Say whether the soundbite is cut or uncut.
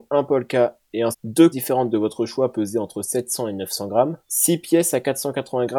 cut